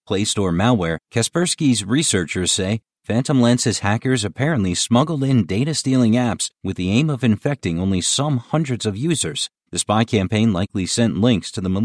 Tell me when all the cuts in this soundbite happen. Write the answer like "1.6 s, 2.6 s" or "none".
1.0 s, 6.5 s, 9.6 s